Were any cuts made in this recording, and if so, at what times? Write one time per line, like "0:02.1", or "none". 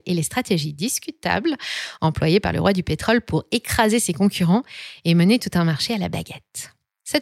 none